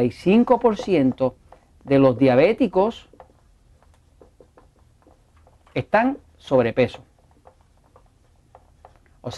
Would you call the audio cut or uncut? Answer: uncut